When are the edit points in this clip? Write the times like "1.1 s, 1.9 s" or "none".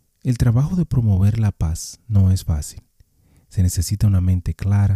none